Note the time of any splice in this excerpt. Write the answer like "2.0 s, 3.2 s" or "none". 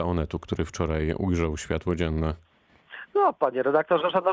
none